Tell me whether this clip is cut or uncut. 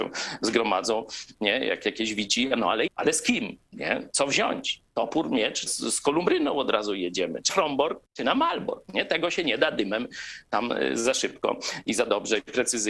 cut